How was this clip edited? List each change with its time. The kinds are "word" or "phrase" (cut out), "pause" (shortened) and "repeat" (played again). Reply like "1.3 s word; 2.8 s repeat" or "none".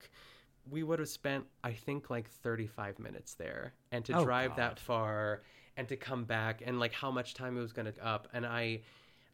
1.5 s pause; 7.9 s word